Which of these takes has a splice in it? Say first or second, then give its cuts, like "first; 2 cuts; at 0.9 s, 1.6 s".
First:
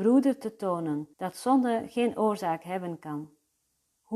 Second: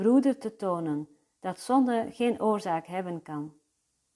first; 1 cut; at 1.1 s